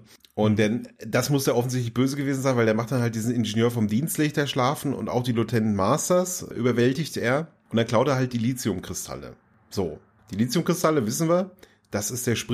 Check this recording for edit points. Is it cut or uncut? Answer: uncut